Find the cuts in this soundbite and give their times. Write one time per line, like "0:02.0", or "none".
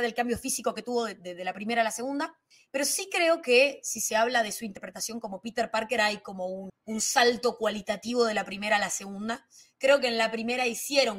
none